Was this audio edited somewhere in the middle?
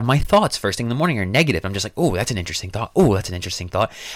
no; 0 cuts

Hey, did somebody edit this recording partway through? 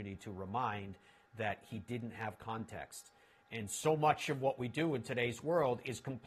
no; 0 cuts

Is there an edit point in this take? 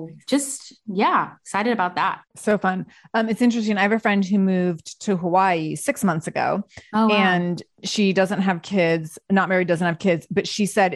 yes; 1 cut; at 2.3 s

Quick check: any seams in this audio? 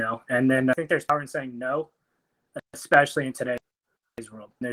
yes; 1 cut; at 2.6 s

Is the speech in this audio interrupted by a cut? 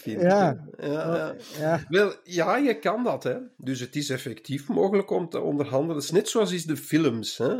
no; 0 cuts

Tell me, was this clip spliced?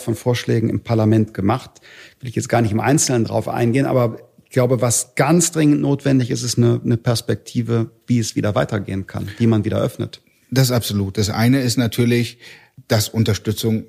no; 0 cuts

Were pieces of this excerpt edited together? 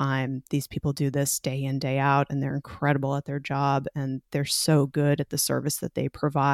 no; 0 cuts

